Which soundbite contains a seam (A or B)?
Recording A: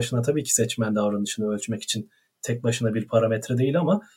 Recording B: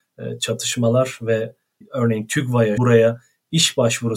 B